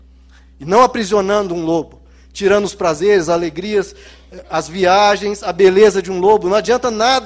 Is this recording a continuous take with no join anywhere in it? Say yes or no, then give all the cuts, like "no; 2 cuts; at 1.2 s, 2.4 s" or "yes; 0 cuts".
yes; 0 cuts